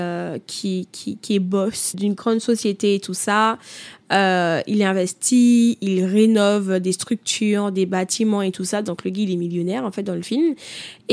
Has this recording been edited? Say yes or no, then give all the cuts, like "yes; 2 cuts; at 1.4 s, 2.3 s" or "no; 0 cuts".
yes; 1 cut; at 1.9 s